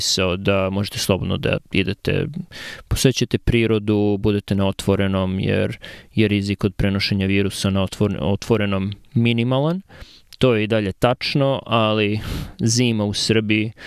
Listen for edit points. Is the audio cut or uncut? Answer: uncut